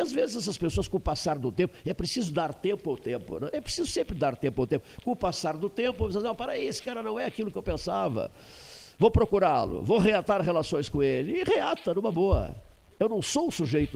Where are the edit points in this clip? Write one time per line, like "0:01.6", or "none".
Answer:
none